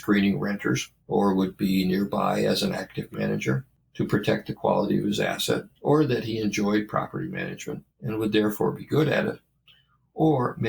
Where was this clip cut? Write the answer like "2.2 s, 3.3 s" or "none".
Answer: 1.0 s, 3.1 s, 5.7 s, 7.9 s